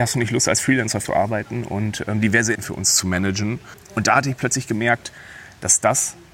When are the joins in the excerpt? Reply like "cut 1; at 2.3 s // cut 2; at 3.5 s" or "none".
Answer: cut 1; at 1.1 s // cut 2; at 2.6 s